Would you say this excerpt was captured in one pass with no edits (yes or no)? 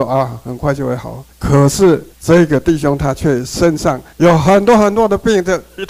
no